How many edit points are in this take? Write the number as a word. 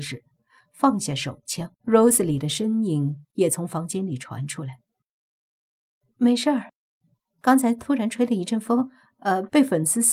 one